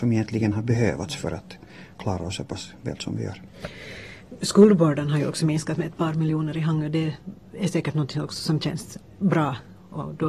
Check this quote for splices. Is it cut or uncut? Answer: cut